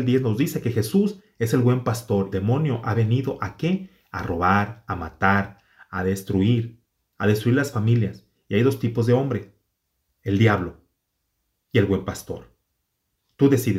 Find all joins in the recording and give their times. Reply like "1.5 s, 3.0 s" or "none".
2.3 s